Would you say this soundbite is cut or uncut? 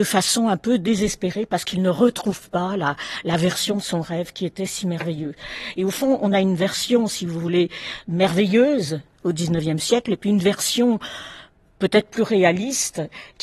uncut